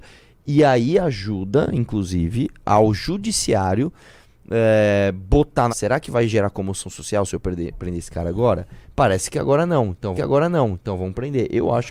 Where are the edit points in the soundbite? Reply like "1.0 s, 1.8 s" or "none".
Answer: 5.7 s, 10.2 s